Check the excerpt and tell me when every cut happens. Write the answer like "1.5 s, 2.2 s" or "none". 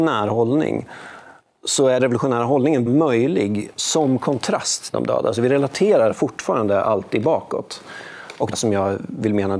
2.0 s, 2.9 s, 4.9 s, 8.5 s